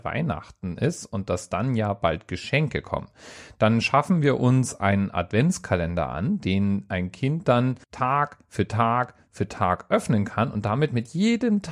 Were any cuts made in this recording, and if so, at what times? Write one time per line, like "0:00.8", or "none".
0:07.8